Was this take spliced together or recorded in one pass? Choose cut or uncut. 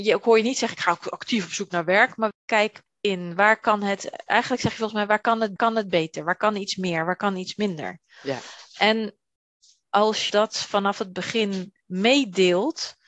cut